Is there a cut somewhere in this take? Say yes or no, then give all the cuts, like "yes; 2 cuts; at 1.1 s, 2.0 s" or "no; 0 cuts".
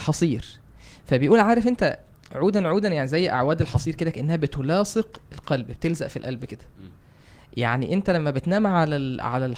no; 0 cuts